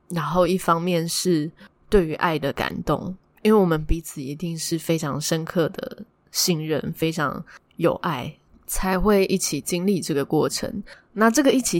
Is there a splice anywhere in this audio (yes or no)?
no